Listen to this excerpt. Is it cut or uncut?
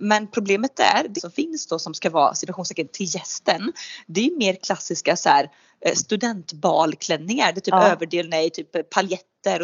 cut